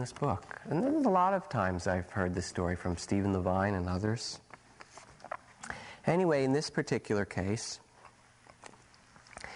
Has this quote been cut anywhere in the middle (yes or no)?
no